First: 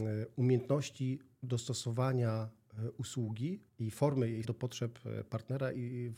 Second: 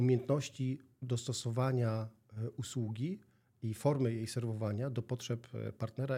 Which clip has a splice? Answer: first; 2 cuts; at 3.7 s, 4.4 s

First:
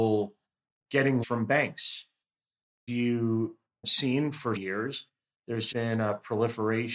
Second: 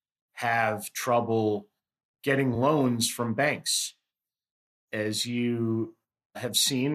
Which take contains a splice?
first; 5 cuts; at 1.2 s, 2.9 s, 3.8 s, 4.6 s, 5.7 s

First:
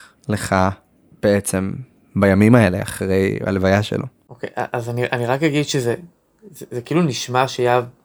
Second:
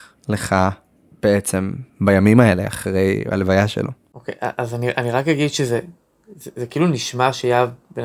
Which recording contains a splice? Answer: second; 1 cut; at 1.9 s

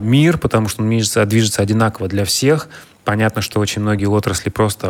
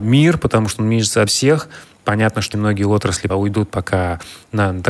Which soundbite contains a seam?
second; 3 cuts; at 1.3 s, 2.5 s, 3.3 s

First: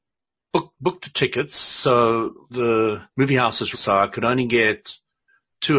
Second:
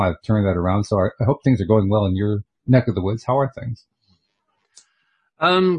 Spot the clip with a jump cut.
first; 3 cuts; at 2.5 s, 3.1 s, 3.7 s

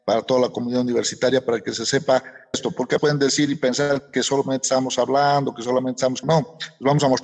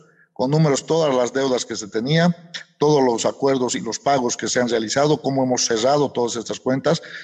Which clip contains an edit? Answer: first; 3 cuts; at 2.5 s, 3.0 s, 6.2 s

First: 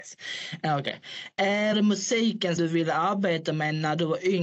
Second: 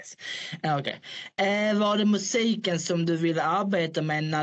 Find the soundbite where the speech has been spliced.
first; 2 cuts; at 1.7 s, 2.6 s

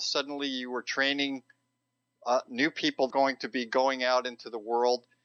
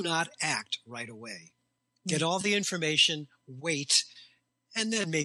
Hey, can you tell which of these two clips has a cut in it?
first; 1 cut; at 3.1 s

